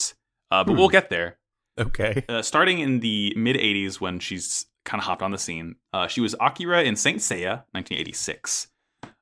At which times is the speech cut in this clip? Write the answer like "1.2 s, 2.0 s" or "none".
5.8 s